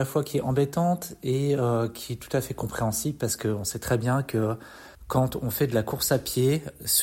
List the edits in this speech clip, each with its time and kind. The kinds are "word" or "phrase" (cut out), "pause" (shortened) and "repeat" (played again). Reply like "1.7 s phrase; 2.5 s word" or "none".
4.9 s pause